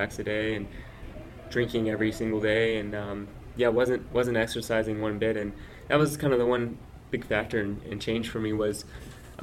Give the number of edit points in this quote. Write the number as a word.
one